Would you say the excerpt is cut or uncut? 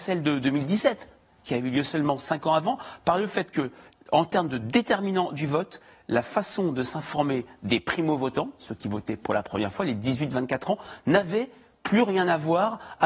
uncut